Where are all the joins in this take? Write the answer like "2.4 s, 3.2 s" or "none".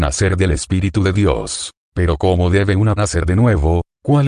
3.0 s